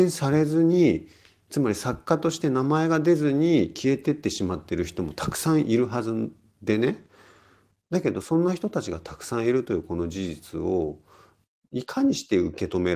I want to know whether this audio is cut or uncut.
uncut